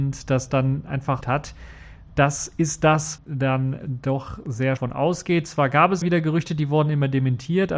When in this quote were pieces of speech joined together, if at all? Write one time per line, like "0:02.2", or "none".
0:01.2
0:03.2
0:04.8
0:06.0

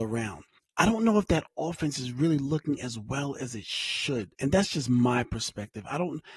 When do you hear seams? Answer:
0:04.3

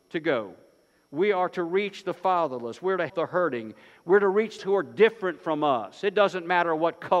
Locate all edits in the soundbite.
0:03.1
0:04.6

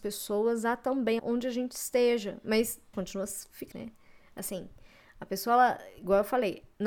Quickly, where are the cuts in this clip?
0:01.2
0:02.9
0:03.7

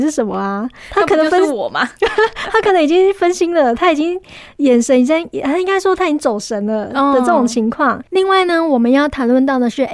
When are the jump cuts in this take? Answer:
0:08.1

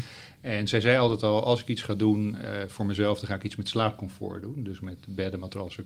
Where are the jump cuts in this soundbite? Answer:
none

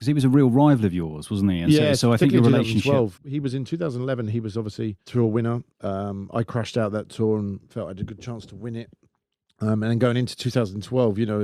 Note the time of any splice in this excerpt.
0:03.2
0:05.7

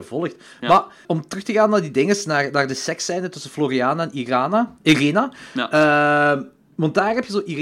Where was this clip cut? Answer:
0:01.0

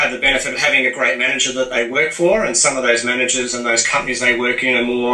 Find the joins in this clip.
none

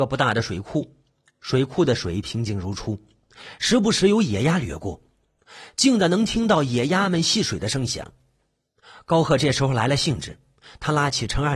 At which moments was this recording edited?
none

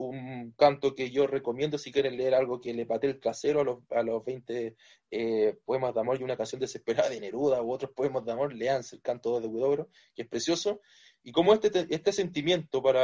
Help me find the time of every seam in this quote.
none

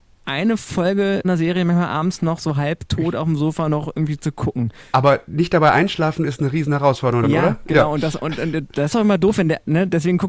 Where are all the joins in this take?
0:01.2
0:07.2

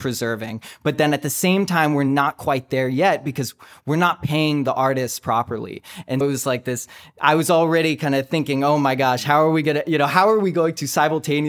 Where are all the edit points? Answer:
0:06.2

